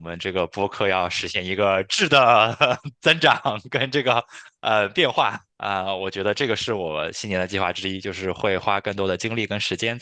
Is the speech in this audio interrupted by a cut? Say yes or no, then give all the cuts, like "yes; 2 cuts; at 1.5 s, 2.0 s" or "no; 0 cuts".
yes; 1 cut; at 5.5 s